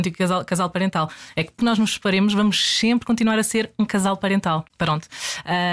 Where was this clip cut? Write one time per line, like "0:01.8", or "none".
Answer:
0:01.6